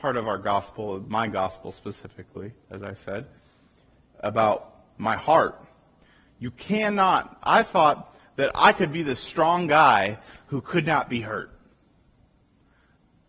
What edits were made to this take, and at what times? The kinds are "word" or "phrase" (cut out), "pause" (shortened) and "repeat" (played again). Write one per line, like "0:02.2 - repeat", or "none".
none

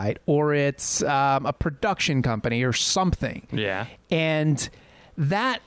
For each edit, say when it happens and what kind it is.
none

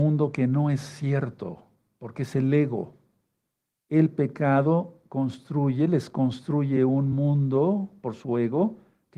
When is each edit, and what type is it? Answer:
none

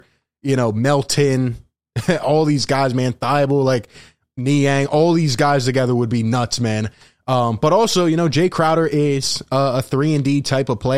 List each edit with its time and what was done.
none

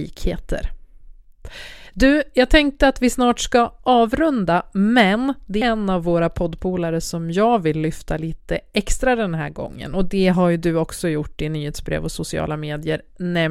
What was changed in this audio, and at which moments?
0:05.6 - word

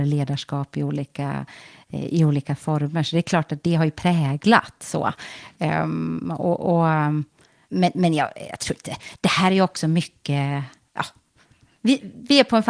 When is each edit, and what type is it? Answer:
none

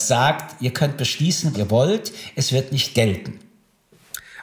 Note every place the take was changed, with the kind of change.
0:01.5 - word

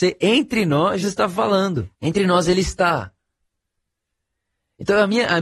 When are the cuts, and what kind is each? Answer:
0:01.0 - word
0:01.9 - pause

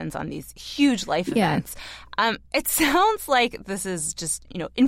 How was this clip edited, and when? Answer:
0:02.5 - pause

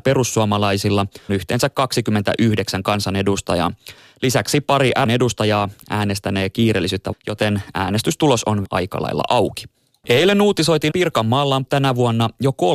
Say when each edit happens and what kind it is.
0:01.3 - word
0:05.0 - word
0:07.1 - word
0:08.6 - word
0:10.9 - word
0:11.7 - word

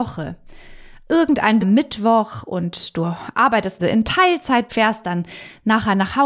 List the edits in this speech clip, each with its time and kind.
0:01.6 - word
0:03.8 - word
0:04.7 - word

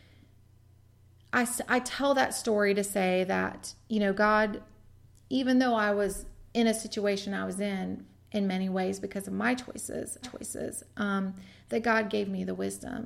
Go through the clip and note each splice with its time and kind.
0:10.2 - repeat

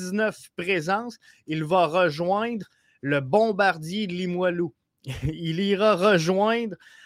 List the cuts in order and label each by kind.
none

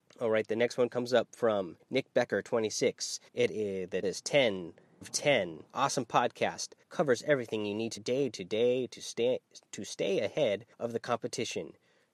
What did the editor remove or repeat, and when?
0:01.8 - pause
0:03.3 - pause
0:04.0 - word
0:05.0 - word
0:05.7 - pause
0:06.8 - pause
0:08.0 - word
0:09.6 - word
0:10.7 - pause

